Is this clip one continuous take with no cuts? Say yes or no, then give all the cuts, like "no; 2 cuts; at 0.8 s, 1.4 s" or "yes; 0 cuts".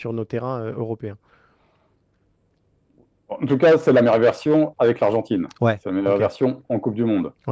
yes; 0 cuts